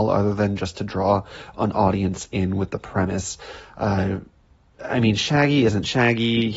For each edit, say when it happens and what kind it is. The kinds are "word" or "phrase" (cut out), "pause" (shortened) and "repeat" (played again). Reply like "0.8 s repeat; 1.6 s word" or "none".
none